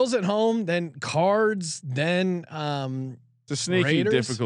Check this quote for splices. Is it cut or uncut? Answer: uncut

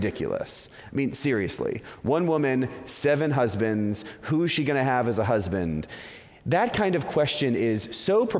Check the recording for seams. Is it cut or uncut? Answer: uncut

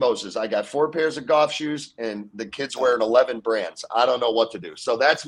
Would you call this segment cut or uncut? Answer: uncut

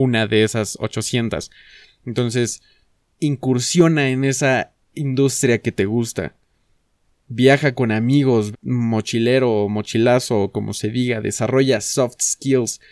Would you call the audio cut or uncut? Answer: cut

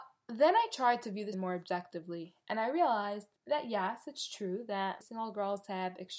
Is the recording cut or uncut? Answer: cut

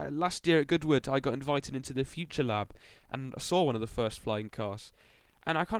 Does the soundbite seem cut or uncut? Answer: uncut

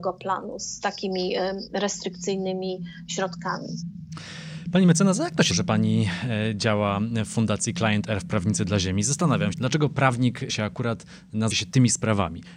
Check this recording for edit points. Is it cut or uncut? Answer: cut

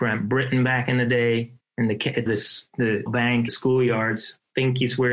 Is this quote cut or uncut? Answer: cut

